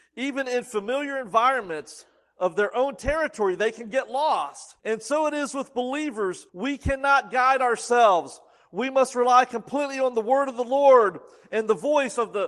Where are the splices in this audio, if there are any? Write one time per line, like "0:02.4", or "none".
0:04.8
0:06.5